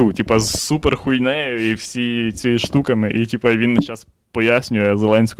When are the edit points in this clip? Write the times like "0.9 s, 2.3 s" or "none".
none